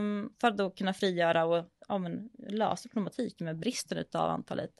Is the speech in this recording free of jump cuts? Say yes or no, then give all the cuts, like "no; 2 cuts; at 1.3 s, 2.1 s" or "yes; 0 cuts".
yes; 0 cuts